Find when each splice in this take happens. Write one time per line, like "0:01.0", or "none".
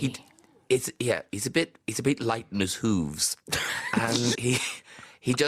0:04.3